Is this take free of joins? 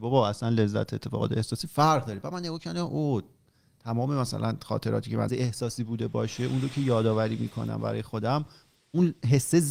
no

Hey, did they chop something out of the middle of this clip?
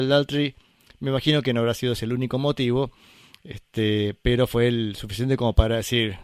no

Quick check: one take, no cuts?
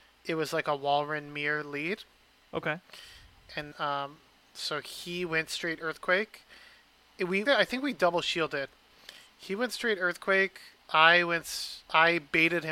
no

